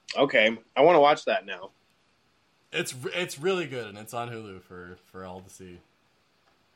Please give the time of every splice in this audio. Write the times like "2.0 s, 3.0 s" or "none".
none